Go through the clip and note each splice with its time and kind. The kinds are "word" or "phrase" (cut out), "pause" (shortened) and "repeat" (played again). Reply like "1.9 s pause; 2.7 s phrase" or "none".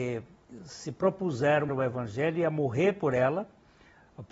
1.7 s phrase